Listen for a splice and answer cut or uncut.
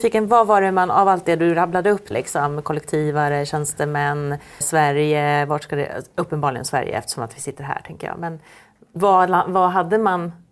cut